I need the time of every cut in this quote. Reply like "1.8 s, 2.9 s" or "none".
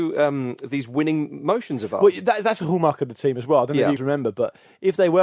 4.0 s